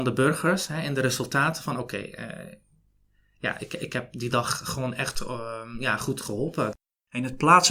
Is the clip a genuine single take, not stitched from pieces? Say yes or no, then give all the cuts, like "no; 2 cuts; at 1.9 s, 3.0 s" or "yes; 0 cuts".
yes; 0 cuts